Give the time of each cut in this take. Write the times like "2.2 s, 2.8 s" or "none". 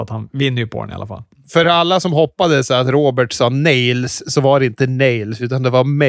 none

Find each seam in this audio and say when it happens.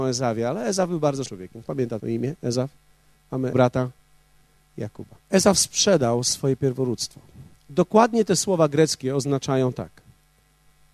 1.3 s, 1.7 s, 2.0 s, 3.5 s, 5.2 s

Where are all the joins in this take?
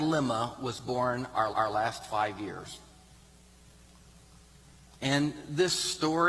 1.5 s

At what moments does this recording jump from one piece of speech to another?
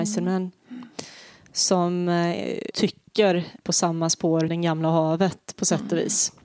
2.7 s, 3.6 s, 4.5 s

